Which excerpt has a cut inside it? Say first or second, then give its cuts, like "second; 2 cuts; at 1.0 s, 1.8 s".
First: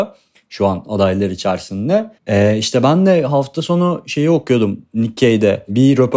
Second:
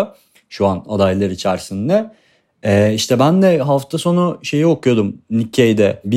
first; 1 cut; at 2.2 s